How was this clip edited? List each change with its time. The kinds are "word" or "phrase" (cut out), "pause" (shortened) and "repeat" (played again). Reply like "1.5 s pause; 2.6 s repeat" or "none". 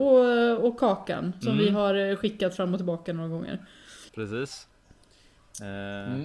1.4 s word; 4.1 s pause